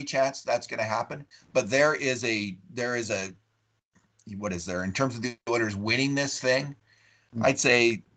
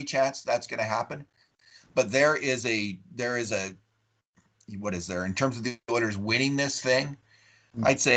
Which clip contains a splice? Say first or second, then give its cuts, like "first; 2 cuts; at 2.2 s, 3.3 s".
first; 1 cut; at 1.3 s